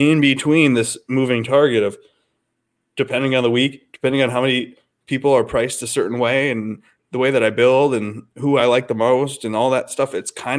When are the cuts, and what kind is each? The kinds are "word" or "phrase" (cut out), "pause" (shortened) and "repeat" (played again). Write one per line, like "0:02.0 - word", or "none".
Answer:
none